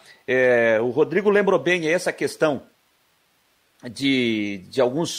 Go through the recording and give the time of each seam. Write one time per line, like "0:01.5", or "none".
none